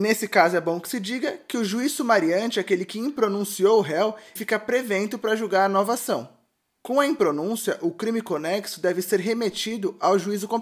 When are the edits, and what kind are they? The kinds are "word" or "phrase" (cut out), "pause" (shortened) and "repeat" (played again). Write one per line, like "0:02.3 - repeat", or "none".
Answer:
0:04.4 - word

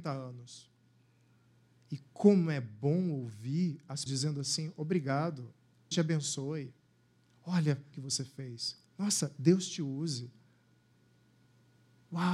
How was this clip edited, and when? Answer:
0:04.1 - word
0:05.9 - word
0:07.9 - phrase
0:08.9 - pause

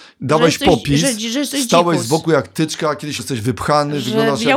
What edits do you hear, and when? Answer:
0:03.2 - phrase

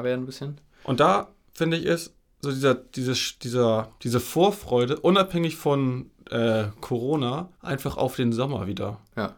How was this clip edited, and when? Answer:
0:04.0 - pause
0:07.5 - pause

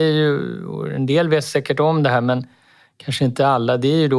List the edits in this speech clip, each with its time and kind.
none

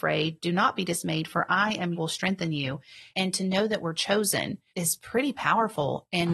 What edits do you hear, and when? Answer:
0:01.9 - phrase
0:03.1 - word
0:04.7 - word

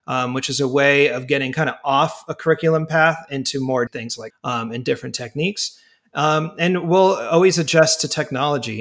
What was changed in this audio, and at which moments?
0:03.9 - phrase
0:04.3 - word

